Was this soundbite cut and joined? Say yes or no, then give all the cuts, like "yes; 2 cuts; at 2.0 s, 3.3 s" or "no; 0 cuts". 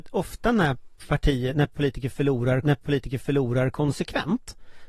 yes; 1 cut; at 2.6 s